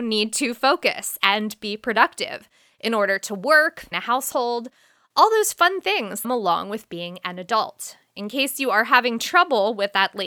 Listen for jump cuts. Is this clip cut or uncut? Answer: cut